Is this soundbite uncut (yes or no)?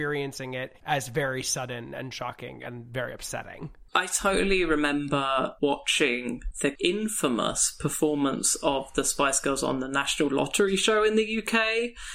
yes